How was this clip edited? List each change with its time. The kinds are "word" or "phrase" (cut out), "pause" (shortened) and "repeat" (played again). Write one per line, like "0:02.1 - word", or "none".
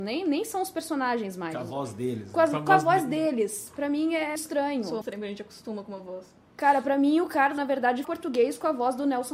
0:04.4 - word
0:05.0 - word
0:07.6 - word
0:08.0 - word